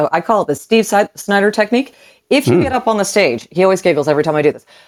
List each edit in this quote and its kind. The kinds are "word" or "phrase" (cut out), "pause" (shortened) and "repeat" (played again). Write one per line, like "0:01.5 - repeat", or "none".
none